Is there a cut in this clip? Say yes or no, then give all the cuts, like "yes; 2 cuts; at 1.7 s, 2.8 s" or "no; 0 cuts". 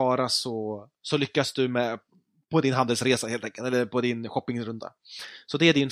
no; 0 cuts